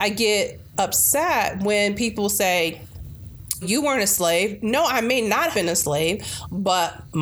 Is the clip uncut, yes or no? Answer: no